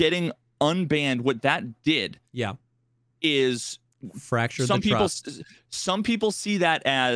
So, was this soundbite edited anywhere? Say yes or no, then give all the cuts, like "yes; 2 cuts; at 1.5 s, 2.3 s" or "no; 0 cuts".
no; 0 cuts